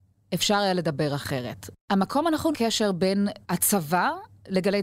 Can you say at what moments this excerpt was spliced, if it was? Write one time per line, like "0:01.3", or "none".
0:01.8
0:02.5
0:03.4